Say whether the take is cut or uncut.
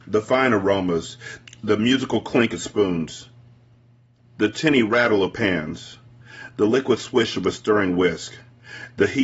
uncut